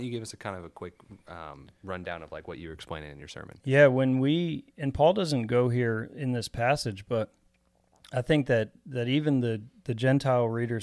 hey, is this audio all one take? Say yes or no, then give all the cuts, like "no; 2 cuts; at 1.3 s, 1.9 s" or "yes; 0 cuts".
yes; 0 cuts